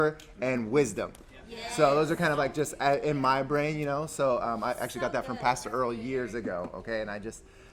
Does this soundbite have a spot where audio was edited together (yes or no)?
no